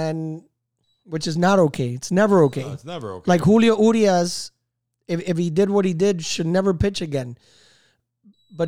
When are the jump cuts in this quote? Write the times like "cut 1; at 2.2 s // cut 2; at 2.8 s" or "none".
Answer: none